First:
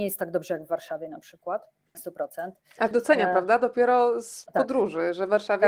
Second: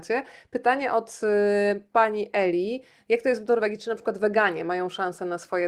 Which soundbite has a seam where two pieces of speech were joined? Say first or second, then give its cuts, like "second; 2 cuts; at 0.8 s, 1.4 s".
first; 3 cuts; at 1.9 s, 2.9 s, 4.5 s